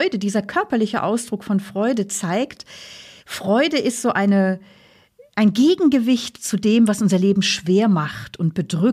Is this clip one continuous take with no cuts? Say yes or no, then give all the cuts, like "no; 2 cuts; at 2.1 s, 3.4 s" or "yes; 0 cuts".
no; 1 cut; at 3.2 s